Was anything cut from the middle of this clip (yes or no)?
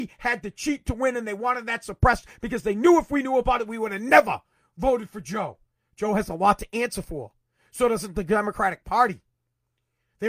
no